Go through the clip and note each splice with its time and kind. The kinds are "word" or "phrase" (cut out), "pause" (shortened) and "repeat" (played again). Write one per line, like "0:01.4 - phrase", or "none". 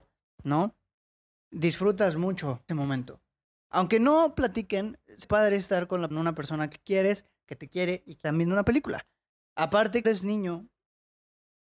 0:02.7 - word
0:05.2 - word
0:06.1 - word
0:08.2 - word
0:10.0 - word